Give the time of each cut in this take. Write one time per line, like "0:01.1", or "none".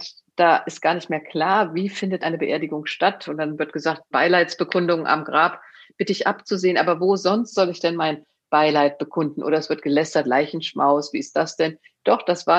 0:02.2
0:04.1